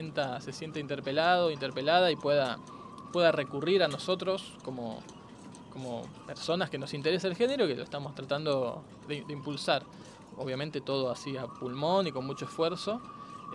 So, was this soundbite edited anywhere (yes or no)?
no